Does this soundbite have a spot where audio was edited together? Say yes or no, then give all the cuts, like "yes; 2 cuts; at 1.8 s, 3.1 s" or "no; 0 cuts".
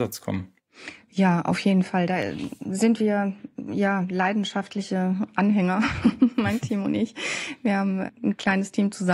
no; 0 cuts